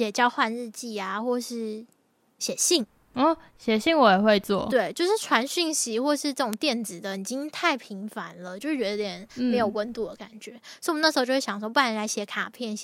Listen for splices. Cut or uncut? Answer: uncut